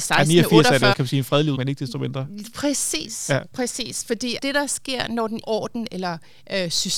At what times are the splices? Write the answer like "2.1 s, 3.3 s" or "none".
0.9 s, 1.6 s, 4.4 s, 5.4 s